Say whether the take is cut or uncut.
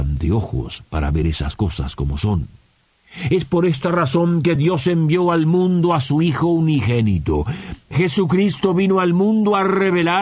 uncut